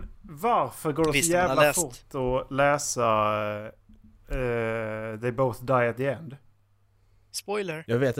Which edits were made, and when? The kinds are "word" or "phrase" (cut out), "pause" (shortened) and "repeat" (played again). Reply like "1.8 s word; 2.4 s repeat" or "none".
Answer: none